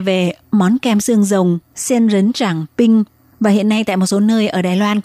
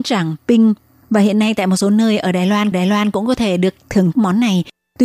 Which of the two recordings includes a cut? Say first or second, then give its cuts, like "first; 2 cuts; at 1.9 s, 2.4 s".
second; 2 cuts; at 2.7 s, 4.1 s